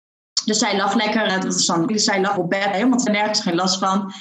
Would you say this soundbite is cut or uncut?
cut